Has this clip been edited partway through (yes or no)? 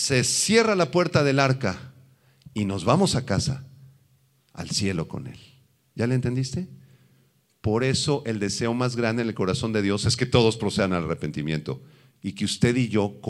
no